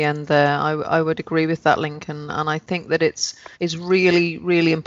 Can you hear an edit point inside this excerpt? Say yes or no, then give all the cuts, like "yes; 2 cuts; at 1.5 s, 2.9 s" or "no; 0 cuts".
yes; 1 cut; at 3.5 s